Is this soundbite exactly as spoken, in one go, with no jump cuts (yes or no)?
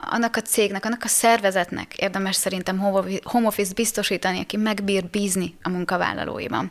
yes